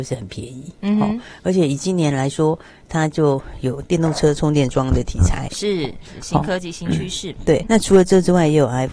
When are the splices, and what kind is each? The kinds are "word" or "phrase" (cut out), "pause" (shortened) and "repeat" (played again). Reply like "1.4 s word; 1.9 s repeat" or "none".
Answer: 7.6 s word